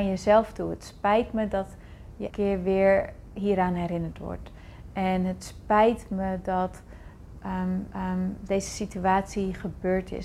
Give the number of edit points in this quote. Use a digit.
2